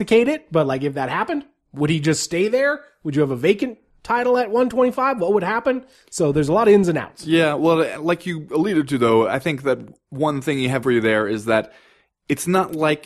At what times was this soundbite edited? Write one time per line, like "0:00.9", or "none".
0:10.8

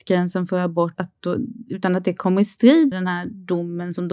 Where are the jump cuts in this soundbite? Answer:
0:01.0
0:02.9

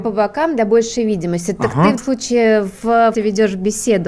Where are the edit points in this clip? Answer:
0:02.0
0:03.1

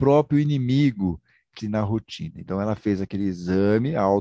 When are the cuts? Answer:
0:01.6

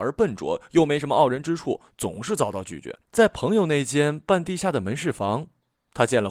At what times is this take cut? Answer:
0:03.0

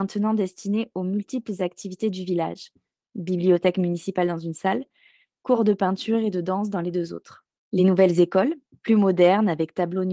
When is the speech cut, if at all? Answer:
none

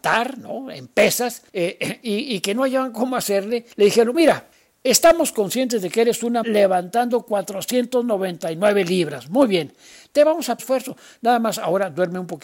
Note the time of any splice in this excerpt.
0:01.5
0:03.7
0:04.1
0:04.5
0:06.4
0:10.6

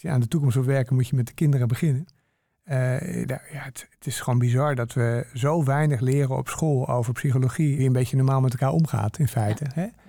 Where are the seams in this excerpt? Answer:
0:03.2
0:03.9
0:07.8

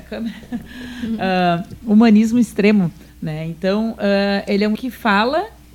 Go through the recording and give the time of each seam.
0:03.1
0:04.7

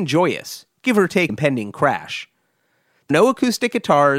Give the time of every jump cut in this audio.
0:01.3
0:03.1

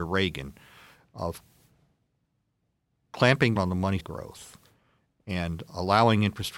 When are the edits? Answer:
0:03.6
0:04.0
0:05.7

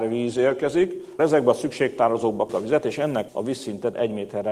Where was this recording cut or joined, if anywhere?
0:01.2
0:02.5
0:03.3

